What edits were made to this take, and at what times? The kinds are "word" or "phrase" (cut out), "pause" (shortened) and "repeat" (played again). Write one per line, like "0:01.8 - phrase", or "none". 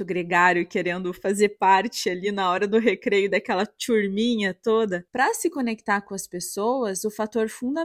none